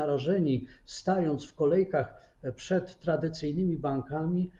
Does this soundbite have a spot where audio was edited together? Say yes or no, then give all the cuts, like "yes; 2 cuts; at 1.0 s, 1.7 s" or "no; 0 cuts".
no; 0 cuts